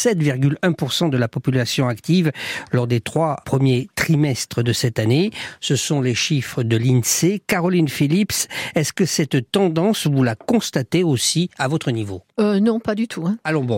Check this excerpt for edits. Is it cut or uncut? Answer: cut